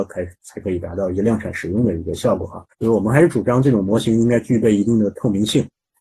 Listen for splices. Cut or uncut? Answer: cut